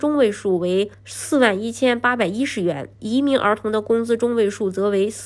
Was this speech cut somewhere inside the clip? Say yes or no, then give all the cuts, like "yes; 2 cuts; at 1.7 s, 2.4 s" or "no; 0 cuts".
yes; 2 cuts; at 0.9 s, 2.9 s